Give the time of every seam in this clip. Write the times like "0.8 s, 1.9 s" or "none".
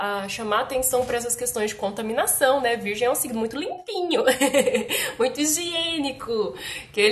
none